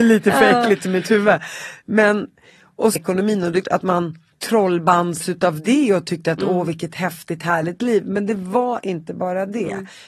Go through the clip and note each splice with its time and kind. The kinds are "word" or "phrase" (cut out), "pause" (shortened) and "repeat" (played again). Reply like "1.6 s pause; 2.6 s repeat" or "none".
3.0 s phrase; 3.6 s word; 4.3 s pause